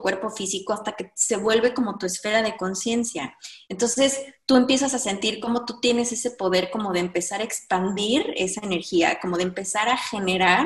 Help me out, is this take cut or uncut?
uncut